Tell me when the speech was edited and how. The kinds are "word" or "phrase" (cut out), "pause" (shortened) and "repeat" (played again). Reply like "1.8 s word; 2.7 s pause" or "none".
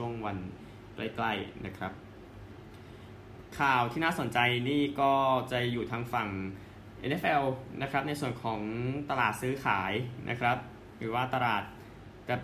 none